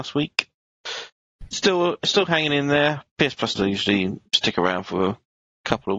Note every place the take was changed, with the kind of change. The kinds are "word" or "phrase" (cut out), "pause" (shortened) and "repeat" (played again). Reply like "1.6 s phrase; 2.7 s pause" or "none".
3.5 s word